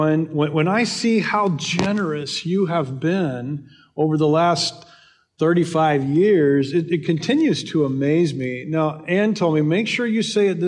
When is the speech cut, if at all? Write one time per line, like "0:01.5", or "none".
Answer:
none